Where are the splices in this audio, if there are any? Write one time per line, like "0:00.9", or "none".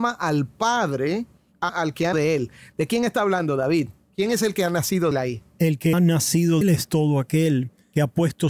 0:01.7
0:02.1
0:05.1
0:05.9
0:06.6